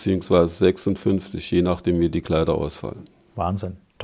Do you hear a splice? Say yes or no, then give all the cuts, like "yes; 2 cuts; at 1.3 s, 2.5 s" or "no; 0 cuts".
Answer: no; 0 cuts